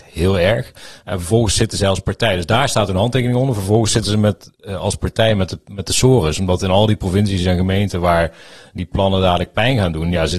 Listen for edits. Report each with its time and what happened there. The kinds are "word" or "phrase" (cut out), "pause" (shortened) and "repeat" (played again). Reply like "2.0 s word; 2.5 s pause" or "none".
none